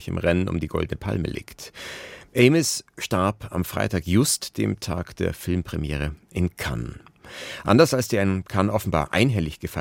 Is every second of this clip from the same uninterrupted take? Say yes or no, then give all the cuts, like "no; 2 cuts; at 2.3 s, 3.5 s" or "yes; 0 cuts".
yes; 0 cuts